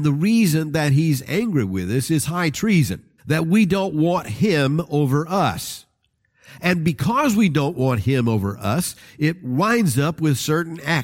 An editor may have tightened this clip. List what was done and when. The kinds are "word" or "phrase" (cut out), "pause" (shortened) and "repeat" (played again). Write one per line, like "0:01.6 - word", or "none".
0:03.2 - pause